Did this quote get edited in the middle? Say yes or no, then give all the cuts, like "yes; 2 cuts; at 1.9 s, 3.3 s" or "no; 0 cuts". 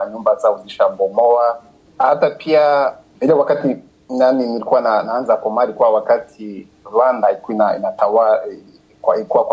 no; 0 cuts